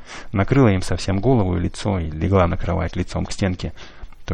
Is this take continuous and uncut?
yes; 0 cuts

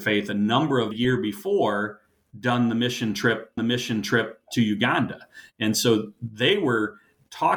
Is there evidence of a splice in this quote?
yes; 2 cuts; at 0.9 s, 3.6 s

